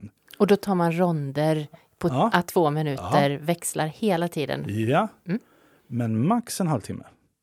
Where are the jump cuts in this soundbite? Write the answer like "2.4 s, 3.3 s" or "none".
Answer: none